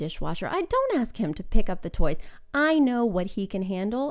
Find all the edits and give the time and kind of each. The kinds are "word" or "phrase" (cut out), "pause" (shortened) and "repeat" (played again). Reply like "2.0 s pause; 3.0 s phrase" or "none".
none